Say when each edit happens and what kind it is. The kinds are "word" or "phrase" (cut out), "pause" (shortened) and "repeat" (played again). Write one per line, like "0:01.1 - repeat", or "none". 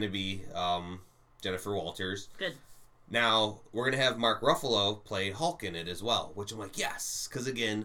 none